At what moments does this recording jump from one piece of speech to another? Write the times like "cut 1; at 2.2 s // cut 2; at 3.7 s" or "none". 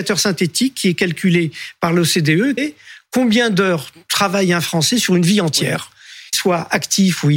cut 1; at 2.6 s // cut 2; at 6.3 s